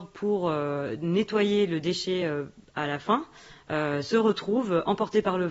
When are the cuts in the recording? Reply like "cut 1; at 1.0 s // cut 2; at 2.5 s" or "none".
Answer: none

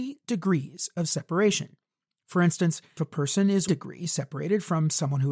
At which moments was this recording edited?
cut 1; at 3.0 s // cut 2; at 3.7 s

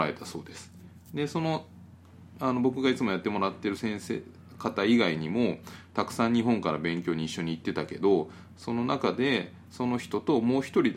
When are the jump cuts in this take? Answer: cut 1; at 1.0 s

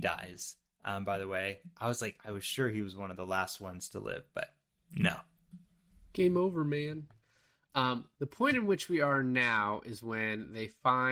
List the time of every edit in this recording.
none

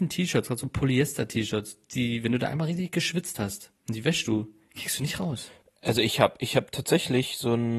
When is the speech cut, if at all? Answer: none

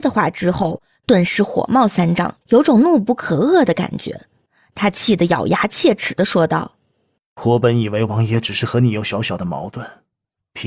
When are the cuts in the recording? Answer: cut 1; at 2.4 s

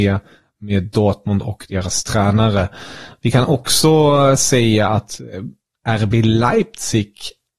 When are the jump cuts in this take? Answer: none

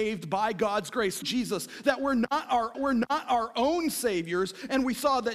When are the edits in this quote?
cut 1; at 1.2 s // cut 2; at 2.7 s

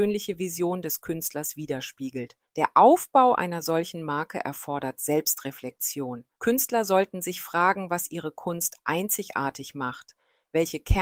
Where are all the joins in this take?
cut 1; at 2.4 s // cut 2; at 6.3 s

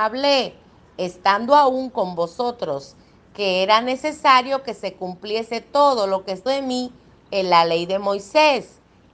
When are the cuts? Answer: cut 1; at 6.5 s

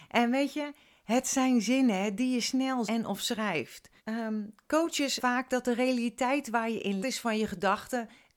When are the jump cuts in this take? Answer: cut 1; at 2.9 s // cut 2; at 4.0 s // cut 3; at 5.2 s // cut 4; at 7.0 s

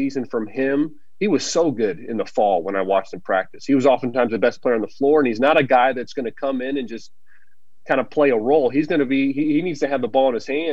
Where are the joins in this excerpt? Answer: none

